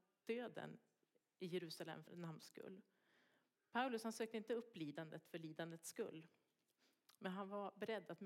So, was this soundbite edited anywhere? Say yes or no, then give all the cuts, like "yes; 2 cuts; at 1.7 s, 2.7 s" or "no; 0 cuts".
yes; 1 cut; at 2.1 s